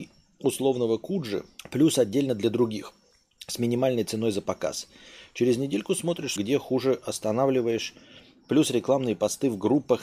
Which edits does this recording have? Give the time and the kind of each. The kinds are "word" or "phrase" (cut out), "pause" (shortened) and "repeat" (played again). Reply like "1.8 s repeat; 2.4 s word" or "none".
3.1 s pause; 6.4 s phrase